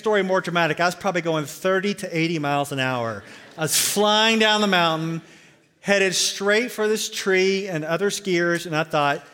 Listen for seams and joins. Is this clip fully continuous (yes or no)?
yes